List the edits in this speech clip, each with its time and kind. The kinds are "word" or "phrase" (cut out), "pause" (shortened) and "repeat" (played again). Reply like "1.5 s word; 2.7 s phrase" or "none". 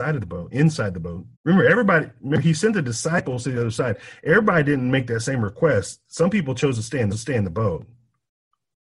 1.3 s pause; 7.1 s repeat